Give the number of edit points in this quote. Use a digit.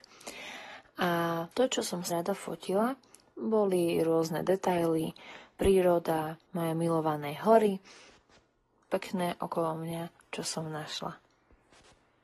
4